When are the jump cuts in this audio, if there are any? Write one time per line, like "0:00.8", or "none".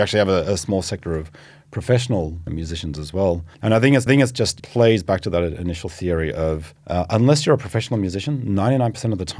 0:02.5
0:03.5
0:04.1
0:04.6
0:06.8